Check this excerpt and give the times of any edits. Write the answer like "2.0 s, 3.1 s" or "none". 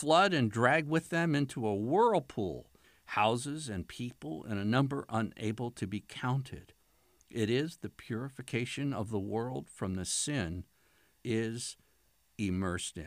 2.8 s, 11.2 s

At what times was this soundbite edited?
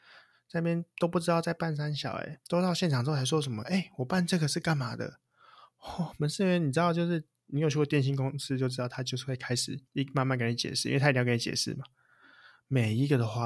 2.5 s, 9.9 s

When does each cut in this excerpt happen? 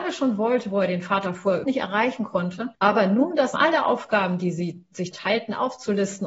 1.6 s, 2.7 s, 3.5 s, 5.1 s

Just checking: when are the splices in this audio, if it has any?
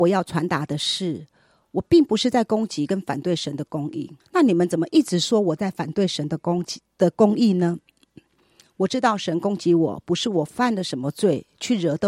4.2 s

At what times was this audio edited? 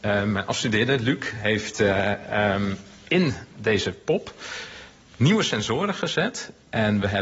none

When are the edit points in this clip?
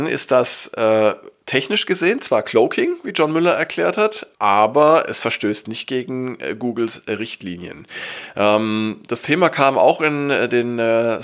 4.3 s

